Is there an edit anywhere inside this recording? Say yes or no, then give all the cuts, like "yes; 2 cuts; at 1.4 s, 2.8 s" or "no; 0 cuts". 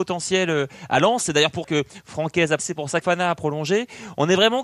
yes; 3 cuts; at 1.6 s, 2.6 s, 3.0 s